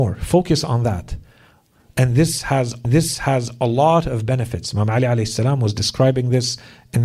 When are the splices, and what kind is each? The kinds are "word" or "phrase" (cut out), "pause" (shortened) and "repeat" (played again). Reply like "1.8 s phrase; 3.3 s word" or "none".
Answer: 2.8 s repeat

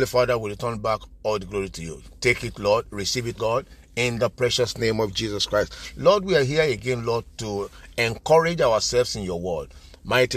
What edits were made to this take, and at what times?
3.4 s word

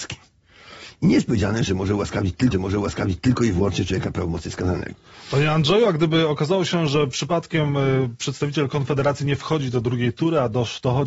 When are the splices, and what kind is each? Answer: 2.5 s repeat

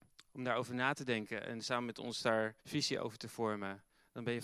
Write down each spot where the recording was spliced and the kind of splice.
2.6 s pause

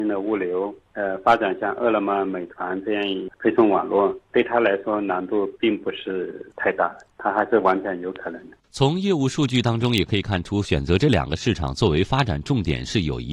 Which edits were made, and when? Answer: 8.6 s pause

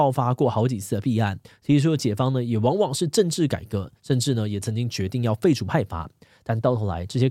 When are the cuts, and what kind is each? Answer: none

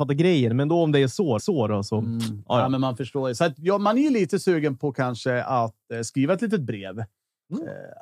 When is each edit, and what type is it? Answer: 1.4 s repeat

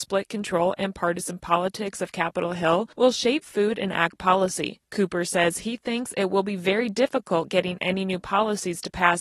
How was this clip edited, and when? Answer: 2.9 s pause; 4.8 s pause

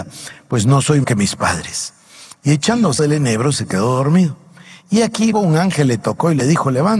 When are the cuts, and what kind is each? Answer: 1.0 s word; 3.0 s word; 5.3 s word

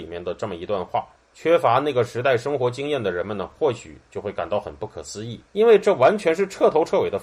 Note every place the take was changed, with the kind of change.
1.2 s pause; 5.5 s pause

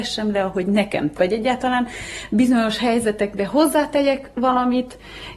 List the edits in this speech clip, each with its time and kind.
1.1 s word; 4.3 s pause

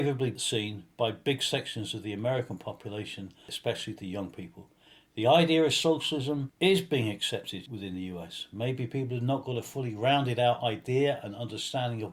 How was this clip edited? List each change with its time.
none

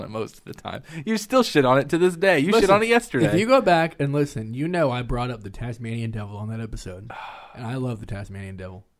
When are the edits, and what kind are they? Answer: none

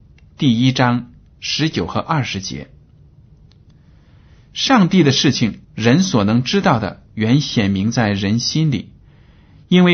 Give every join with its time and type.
5.6 s pause; 7.1 s pause

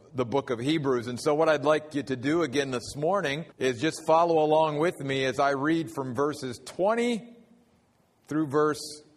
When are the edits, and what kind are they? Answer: 3.5 s pause

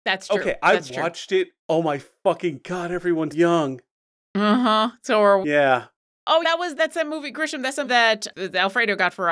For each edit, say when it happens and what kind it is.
1.6 s word; 3.3 s word; 5.4 s word; 6.4 s word; 6.8 s word; 7.8 s word

